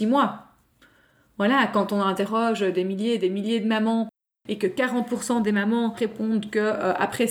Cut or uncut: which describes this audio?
uncut